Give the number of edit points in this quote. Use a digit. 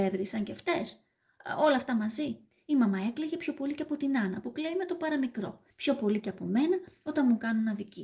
1